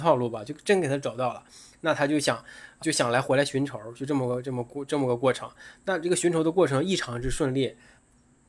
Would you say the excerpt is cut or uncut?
cut